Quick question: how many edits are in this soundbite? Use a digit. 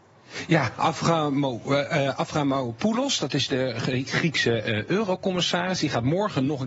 0